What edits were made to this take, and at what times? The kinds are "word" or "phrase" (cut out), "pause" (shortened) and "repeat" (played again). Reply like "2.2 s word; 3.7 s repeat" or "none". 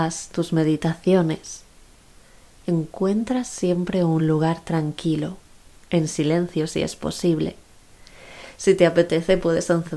none